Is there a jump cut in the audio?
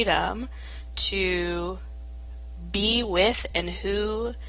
no; 0 cuts

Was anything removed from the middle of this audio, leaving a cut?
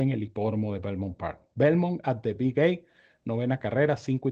no; 0 cuts

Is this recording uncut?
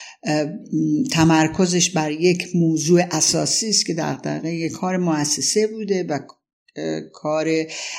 yes; 0 cuts

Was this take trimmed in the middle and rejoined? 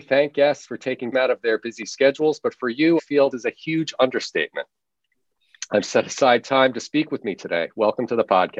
yes; 4 cuts; at 1.1 s, 3.0 s, 3.3 s, 5.8 s

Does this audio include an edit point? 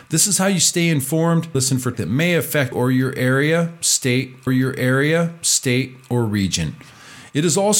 yes; 4 cuts; at 1.5 s, 1.9 s, 2.7 s, 4.5 s

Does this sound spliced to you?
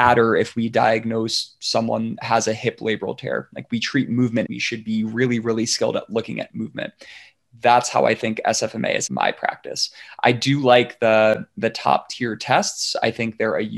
yes; 2 cuts; at 4.4 s, 9.1 s

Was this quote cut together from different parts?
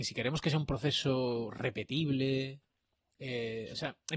no; 0 cuts

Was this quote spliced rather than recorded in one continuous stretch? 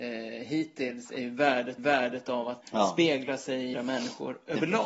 yes; 3 cuts; at 1.8 s, 2.6 s, 3.7 s

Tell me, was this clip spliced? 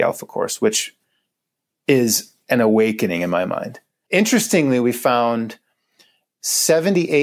yes; 1 cut; at 4.1 s

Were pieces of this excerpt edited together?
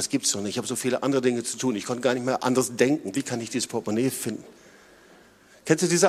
no; 0 cuts

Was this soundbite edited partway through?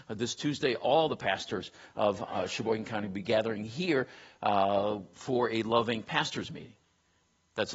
no; 0 cuts

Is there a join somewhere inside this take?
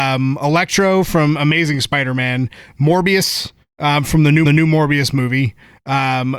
yes; 1 cut; at 4.5 s

